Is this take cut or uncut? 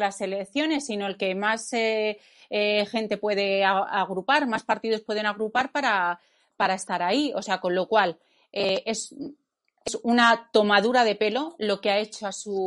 uncut